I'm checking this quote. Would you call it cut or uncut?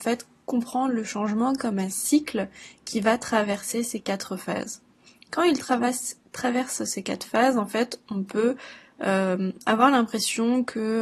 uncut